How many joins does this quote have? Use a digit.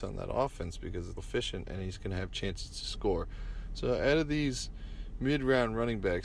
1